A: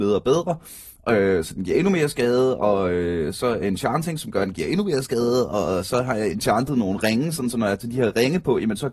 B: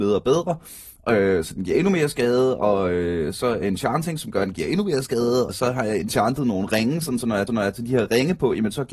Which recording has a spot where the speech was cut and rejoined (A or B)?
B